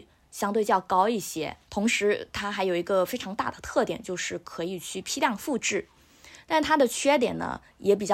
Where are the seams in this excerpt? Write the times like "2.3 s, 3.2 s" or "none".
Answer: 1.6 s